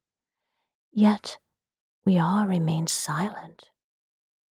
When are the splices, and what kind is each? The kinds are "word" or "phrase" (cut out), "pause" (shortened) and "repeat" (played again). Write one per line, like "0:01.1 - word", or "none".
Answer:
none